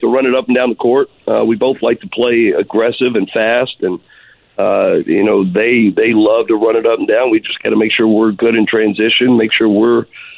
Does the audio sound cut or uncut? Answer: uncut